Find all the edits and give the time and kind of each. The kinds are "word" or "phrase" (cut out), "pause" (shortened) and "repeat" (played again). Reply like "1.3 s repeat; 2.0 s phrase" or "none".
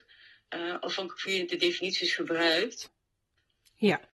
1.3 s word